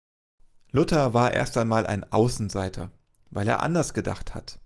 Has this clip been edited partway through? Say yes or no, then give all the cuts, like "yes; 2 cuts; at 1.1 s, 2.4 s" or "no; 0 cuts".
no; 0 cuts